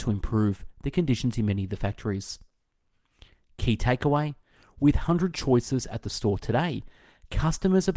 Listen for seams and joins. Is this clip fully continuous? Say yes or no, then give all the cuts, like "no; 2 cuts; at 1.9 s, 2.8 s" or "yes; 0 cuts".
no; 1 cut; at 5.3 s